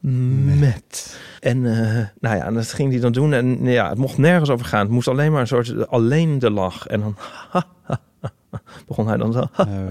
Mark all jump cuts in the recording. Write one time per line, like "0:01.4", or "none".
0:01.4
0:02.2